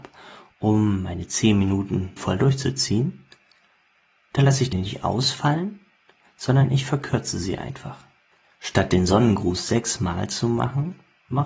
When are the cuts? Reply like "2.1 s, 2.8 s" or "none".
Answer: 2.2 s, 4.7 s